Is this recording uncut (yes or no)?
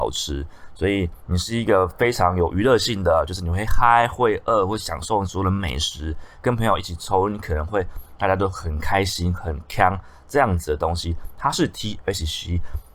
yes